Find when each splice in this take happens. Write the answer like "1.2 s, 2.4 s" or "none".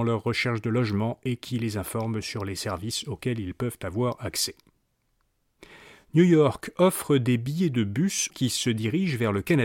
8.3 s